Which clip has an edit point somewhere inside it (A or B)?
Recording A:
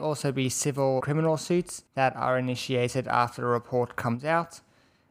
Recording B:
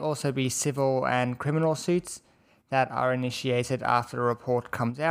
A